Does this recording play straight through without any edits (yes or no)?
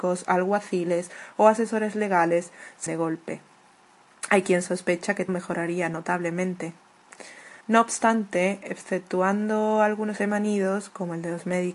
no